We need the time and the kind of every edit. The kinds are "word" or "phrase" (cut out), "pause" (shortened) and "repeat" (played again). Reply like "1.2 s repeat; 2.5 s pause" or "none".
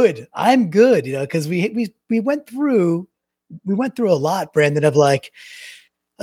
none